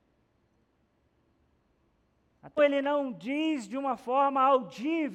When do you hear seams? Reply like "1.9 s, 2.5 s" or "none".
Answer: 2.6 s